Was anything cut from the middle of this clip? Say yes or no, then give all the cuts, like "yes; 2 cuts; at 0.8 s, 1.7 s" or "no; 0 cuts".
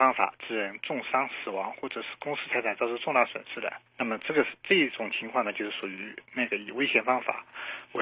yes; 1 cut; at 3.9 s